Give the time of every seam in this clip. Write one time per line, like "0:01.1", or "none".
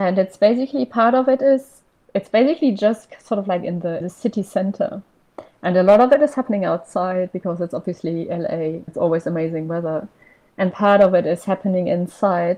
0:02.0
0:04.0
0:08.9
0:10.7